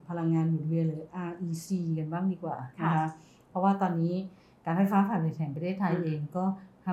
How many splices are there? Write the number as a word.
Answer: zero